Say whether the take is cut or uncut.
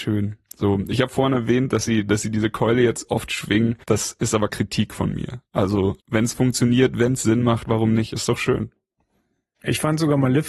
cut